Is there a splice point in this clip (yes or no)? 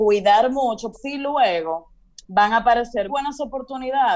yes